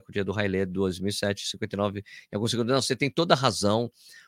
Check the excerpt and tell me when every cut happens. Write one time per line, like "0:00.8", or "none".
none